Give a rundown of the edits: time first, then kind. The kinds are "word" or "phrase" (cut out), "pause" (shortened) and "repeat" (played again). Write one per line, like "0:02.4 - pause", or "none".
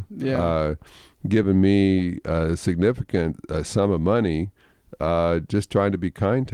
none